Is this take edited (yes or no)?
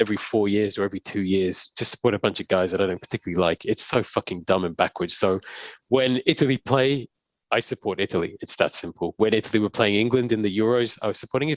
no